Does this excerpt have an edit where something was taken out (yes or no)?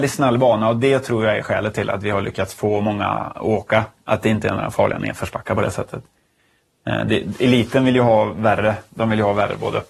no